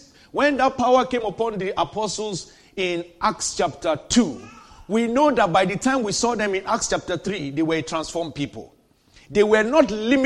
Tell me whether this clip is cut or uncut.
uncut